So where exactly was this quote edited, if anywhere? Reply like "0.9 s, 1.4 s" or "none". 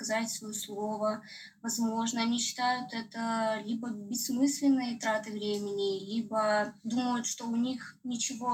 6.8 s